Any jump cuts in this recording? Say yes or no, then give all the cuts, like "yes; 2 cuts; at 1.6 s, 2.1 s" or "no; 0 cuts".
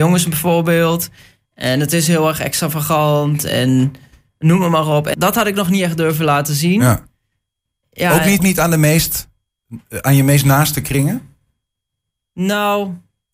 yes; 2 cuts; at 5.1 s, 8.4 s